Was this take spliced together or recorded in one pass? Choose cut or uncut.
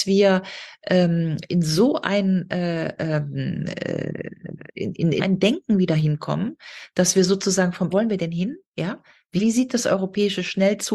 cut